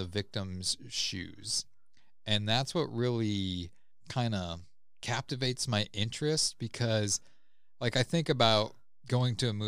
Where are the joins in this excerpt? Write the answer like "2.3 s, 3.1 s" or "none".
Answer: none